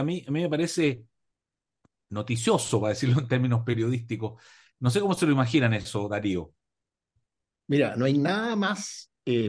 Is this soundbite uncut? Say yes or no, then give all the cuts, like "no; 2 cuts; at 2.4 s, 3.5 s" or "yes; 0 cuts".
yes; 0 cuts